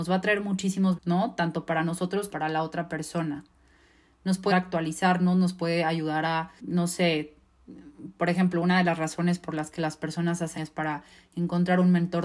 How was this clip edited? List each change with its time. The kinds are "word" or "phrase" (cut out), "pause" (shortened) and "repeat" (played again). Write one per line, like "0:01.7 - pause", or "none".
0:01.0 - word
0:02.3 - word
0:04.5 - word
0:06.6 - word
0:10.6 - word